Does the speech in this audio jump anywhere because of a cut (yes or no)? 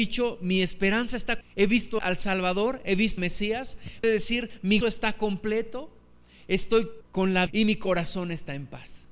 yes